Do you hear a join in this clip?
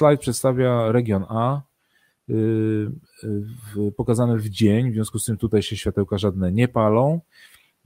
no; 0 cuts

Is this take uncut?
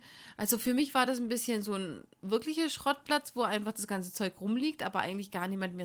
yes; 0 cuts

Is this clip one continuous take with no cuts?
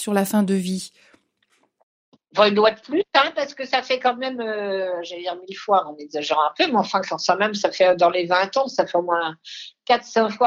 yes; 0 cuts

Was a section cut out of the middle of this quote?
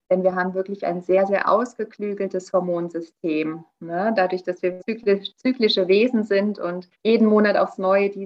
yes; 2 cuts; at 4.8 s, 6.9 s

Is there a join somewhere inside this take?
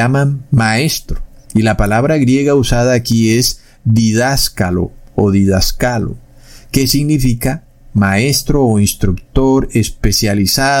no; 0 cuts

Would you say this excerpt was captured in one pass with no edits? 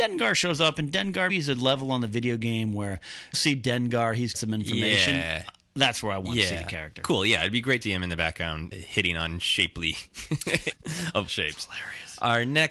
no; 7 cuts; at 1.3 s, 3.3 s, 4.3 s, 7.8 s, 8.7 s, 10.7 s, 11.3 s

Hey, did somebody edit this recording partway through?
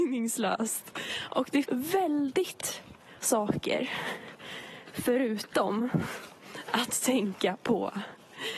yes; 2 cuts; at 1.6 s, 3.2 s

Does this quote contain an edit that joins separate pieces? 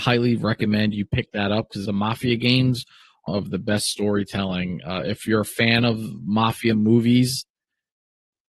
yes; 2 cuts; at 1.9 s, 3.3 s

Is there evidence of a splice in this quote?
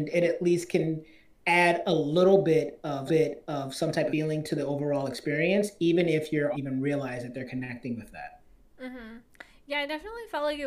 yes; 3 cuts; at 3.1 s, 4.1 s, 6.5 s

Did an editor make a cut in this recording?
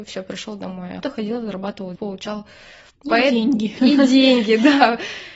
yes; 3 cuts; at 1.0 s, 1.9 s, 3.0 s

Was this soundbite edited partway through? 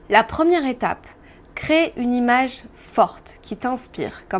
no; 0 cuts

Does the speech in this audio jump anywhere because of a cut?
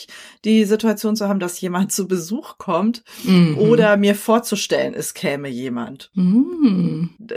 no; 0 cuts

